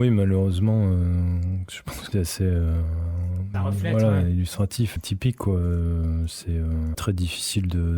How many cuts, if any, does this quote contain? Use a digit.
4